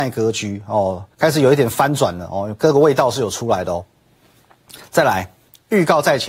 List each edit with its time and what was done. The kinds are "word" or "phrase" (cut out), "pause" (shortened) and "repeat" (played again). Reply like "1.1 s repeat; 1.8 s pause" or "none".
1.1 s pause